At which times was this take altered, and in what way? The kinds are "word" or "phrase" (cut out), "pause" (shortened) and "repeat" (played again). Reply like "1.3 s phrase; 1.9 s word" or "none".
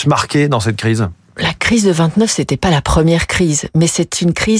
none

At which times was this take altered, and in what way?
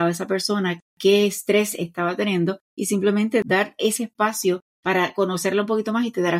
2.6 s pause; 4.7 s pause

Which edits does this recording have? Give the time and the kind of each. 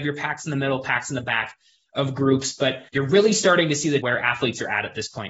2.9 s pause; 4.0 s phrase

